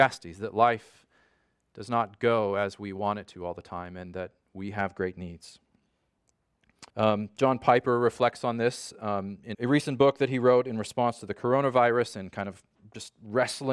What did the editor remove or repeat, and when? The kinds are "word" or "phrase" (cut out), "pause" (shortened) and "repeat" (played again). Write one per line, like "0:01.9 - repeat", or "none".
0:06.9 - pause
0:09.5 - word

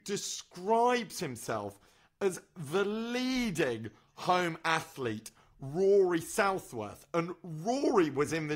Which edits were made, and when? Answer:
none

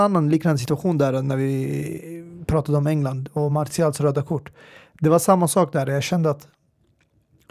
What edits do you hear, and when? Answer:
none

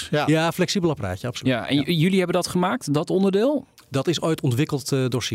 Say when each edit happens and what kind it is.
none

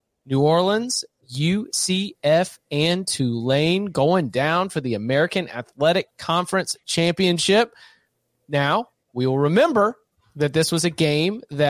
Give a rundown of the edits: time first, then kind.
none

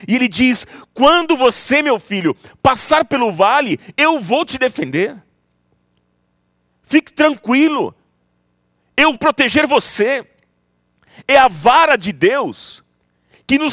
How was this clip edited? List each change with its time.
0:09.1 - word

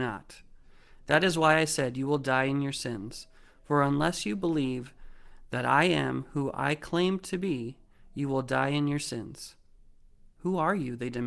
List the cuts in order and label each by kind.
none

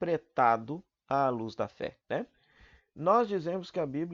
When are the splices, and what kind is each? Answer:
0:02.0 - pause

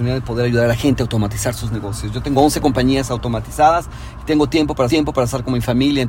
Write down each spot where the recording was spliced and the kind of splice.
0:04.9 - repeat

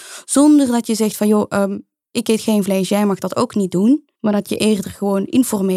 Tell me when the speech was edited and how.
0:04.1 - pause

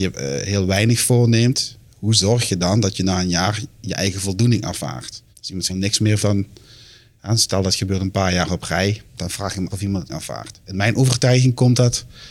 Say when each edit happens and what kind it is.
0:05.3 - pause
0:05.7 - word
0:06.2 - word
0:09.1 - pause
0:09.7 - word
0:10.1 - word

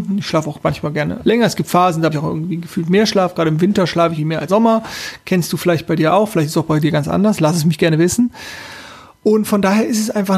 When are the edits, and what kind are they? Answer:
0:01.2 - word
0:02.1 - word
0:04.2 - word
0:04.5 - word

